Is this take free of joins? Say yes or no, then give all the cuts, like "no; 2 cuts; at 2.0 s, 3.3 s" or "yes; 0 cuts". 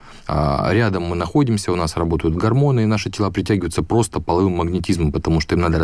yes; 0 cuts